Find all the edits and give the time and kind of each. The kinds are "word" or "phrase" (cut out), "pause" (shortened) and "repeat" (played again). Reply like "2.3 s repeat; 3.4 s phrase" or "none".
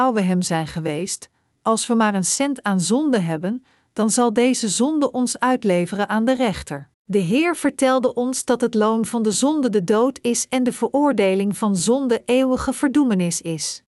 6.9 s pause